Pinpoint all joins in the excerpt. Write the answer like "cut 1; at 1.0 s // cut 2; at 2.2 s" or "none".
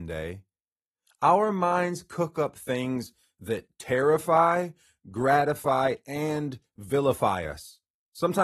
none